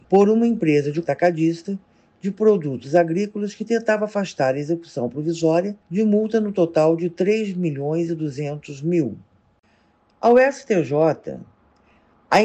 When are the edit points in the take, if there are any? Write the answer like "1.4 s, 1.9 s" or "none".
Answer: 1.0 s